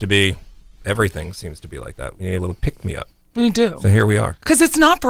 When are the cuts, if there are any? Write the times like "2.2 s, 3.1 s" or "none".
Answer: none